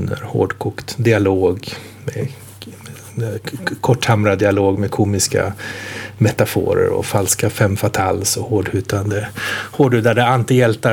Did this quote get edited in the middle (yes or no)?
no